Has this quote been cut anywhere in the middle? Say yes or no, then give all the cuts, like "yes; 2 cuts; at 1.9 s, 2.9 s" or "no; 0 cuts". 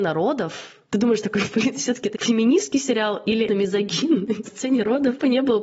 yes; 2 cuts; at 3.5 s, 4.4 s